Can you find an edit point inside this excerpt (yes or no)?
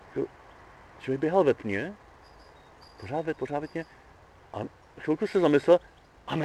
yes